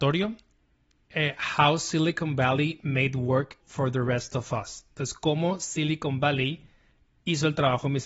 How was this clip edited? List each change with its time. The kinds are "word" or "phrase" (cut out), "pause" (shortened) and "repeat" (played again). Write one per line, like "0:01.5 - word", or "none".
0:03.6 - word